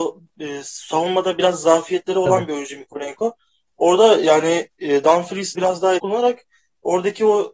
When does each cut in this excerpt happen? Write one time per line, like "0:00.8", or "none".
0:05.5
0:06.0